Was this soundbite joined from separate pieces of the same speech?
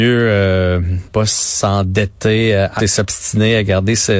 yes; 2 cuts; at 1.1 s, 2.8 s

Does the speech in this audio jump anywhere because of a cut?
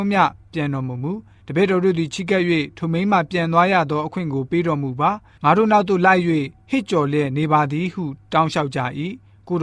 yes; 1 cut; at 1.4 s

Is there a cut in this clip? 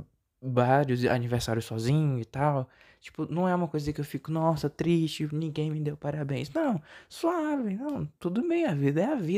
no; 0 cuts

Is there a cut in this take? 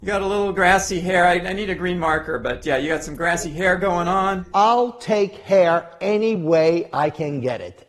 no; 0 cuts

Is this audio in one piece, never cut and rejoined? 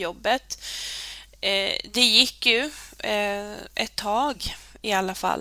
yes; 0 cuts

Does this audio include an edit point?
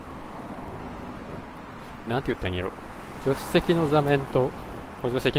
yes; 1 cut; at 2.1 s

